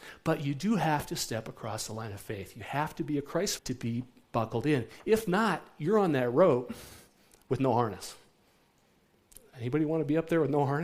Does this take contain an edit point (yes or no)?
yes